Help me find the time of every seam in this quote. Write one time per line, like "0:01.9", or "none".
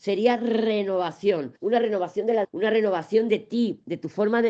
0:01.6
0:02.4